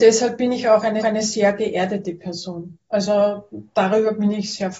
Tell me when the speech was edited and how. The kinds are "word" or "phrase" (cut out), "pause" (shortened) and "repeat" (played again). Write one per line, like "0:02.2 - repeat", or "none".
0:01.0 - repeat